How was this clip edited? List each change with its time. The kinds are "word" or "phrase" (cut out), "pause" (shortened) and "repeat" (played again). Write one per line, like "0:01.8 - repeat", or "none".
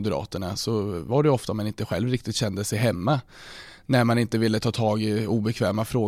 none